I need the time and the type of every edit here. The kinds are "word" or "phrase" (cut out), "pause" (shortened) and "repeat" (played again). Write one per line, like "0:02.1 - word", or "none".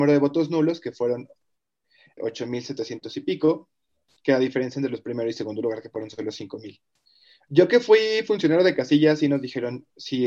0:02.2 - word